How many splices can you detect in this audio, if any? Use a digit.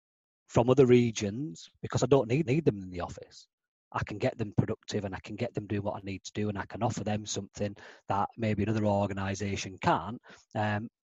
1